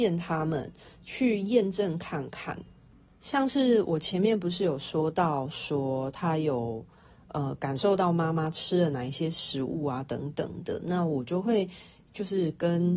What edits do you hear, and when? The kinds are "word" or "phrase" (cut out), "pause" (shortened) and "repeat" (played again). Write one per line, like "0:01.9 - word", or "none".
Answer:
0:02.9 - pause